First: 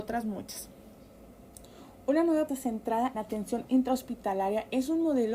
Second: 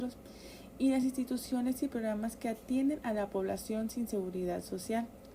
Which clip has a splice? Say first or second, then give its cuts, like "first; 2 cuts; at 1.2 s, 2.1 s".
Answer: first; 2 cuts; at 2.5 s, 3.1 s